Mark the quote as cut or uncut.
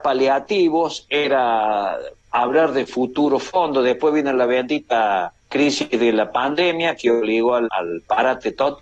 uncut